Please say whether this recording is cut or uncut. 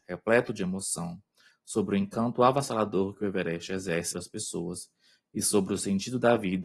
cut